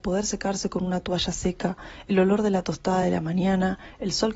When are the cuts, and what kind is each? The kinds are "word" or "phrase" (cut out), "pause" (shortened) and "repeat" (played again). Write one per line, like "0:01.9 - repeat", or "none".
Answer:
none